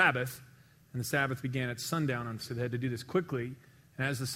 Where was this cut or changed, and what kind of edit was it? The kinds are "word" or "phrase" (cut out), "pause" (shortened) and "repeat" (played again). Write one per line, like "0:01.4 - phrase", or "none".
0:02.4 - word